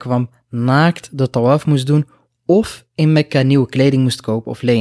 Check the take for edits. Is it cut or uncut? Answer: uncut